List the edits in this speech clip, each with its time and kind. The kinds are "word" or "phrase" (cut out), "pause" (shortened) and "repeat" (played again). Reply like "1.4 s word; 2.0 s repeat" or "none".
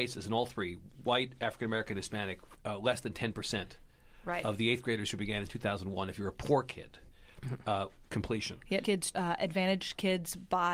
2.6 s pause; 8.1 s word; 8.8 s word; 9.1 s word